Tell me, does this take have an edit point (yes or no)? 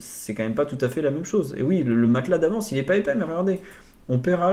no